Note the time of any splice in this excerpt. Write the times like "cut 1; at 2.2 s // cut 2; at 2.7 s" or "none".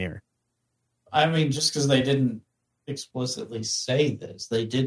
none